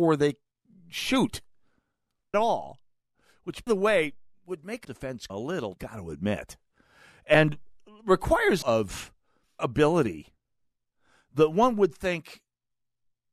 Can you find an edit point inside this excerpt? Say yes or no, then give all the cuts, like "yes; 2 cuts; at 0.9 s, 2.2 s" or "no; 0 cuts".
yes; 7 cuts; at 2.3 s, 3.7 s, 4.8 s, 5.3 s, 5.8 s, 8.6 s, 9.6 s